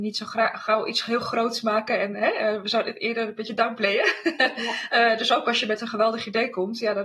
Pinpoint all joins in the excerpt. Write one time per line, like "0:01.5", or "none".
none